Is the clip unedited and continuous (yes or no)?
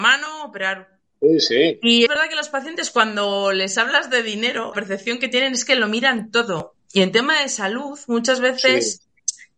no